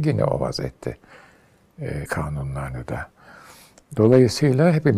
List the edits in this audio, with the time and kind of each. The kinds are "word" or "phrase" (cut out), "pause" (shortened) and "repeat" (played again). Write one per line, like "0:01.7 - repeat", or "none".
0:02.1 - word